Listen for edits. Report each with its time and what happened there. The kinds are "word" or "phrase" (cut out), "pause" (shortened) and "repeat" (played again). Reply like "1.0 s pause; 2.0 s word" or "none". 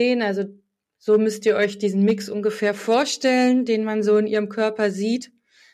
none